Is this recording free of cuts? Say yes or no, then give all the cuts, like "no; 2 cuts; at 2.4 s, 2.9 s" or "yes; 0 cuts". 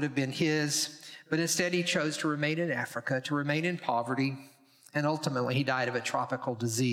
yes; 0 cuts